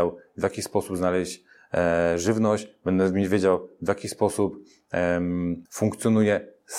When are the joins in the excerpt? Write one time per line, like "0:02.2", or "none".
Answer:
0:05.7